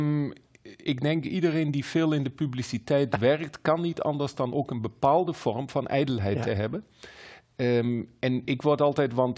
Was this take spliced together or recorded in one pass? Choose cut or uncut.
uncut